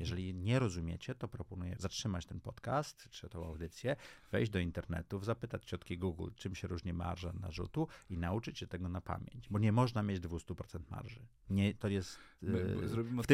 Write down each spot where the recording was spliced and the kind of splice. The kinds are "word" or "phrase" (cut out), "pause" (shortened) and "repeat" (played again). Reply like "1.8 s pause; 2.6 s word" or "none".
1.8 s word